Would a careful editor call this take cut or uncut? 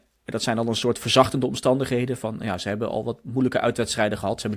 uncut